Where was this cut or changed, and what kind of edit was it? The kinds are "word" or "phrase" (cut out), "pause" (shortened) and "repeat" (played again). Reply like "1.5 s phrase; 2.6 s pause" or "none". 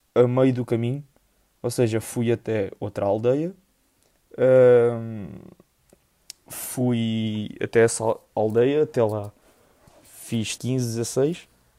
10.6 s word

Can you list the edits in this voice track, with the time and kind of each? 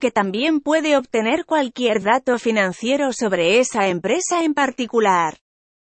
none

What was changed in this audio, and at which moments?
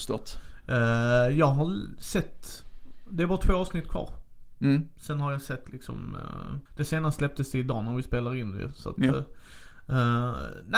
6.7 s pause

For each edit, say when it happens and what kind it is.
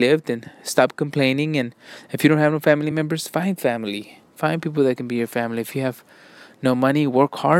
none

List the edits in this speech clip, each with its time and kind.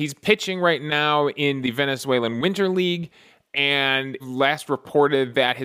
4.2 s phrase

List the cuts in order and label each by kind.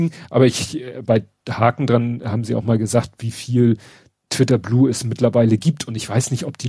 none

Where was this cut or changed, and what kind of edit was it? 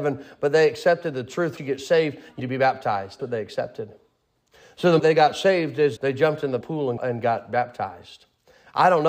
1.6 s word; 2.4 s word; 3.2 s word; 5.0 s word; 6.0 s word; 6.6 s word; 7.0 s word

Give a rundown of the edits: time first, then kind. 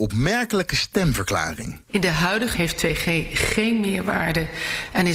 2.5 s word

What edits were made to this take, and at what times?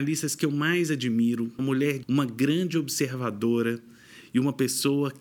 1.6 s word; 2.0 s word

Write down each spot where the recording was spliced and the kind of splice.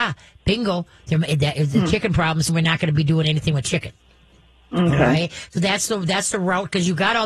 2.5 s word

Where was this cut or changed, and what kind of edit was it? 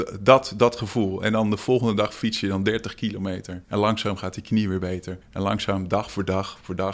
3.6 s pause; 5.2 s pause

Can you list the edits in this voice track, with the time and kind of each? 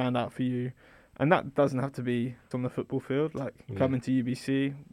2.5 s word

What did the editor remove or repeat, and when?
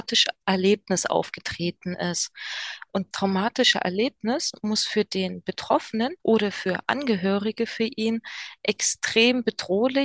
3.1 s word; 6.2 s pause

